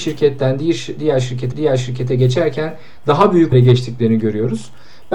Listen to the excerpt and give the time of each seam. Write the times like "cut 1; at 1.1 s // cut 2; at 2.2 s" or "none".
cut 1; at 1.5 s // cut 2; at 3.5 s

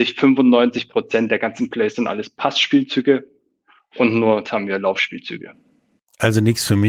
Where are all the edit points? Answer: cut 1; at 4.5 s

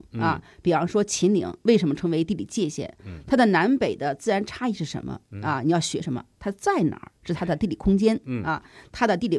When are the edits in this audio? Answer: none

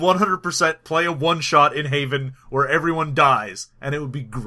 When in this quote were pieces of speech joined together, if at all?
none

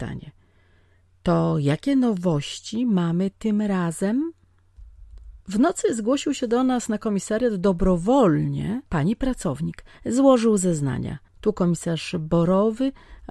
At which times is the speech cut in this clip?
cut 1; at 5.4 s // cut 2; at 8.9 s // cut 3; at 9.9 s // cut 4; at 11.3 s

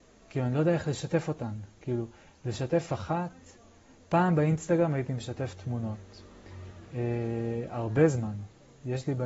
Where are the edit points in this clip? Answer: none

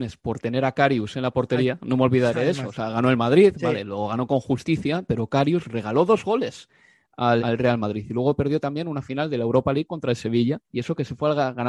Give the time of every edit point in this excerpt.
cut 1; at 7.4 s // cut 2; at 10.6 s

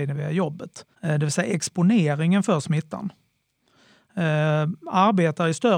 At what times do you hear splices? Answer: cut 1; at 0.9 s

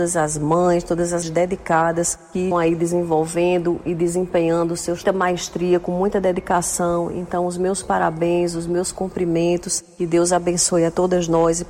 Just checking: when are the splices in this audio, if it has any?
cut 1; at 1.2 s // cut 2; at 2.5 s // cut 3; at 5.0 s

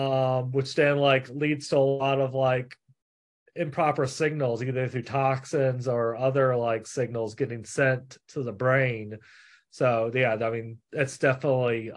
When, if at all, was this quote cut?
none

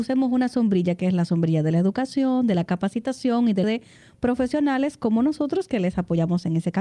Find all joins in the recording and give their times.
cut 1; at 3.6 s

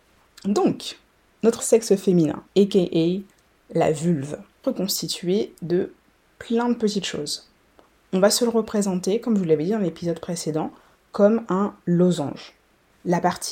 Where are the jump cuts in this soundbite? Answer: cut 1; at 1.6 s // cut 2; at 2.5 s // cut 3; at 4.6 s

